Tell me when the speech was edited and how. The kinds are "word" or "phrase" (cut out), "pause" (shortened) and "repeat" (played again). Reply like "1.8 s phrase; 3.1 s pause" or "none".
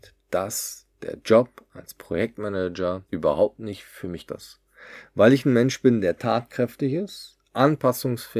3.1 s pause; 4.3 s word